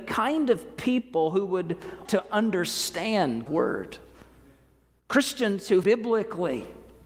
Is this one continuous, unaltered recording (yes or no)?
no